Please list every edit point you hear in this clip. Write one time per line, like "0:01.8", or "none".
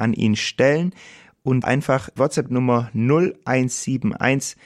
0:01.6
0:02.2